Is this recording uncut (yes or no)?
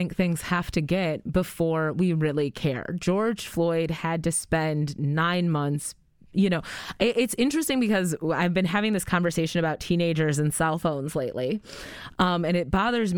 yes